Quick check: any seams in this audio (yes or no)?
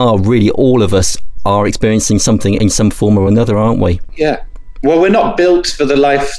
no